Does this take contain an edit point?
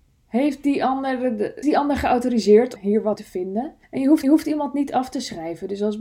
yes; 5 cuts; at 1.6 s, 2.8 s, 3.2 s, 3.8 s, 4.2 s

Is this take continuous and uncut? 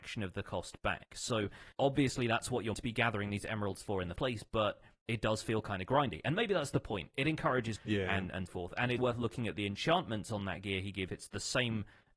no; 7 cuts; at 1.7 s, 2.7 s, 4.2 s, 7.8 s, 8.5 s, 9.0 s, 11.1 s

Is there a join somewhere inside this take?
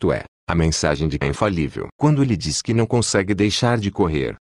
yes; 1 cut; at 1.2 s

